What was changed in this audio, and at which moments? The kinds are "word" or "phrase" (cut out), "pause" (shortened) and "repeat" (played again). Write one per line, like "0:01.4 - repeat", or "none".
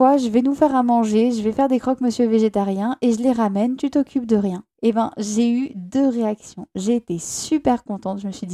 0:04.7 - pause